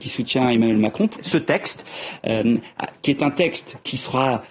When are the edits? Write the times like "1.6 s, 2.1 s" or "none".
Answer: 1.2 s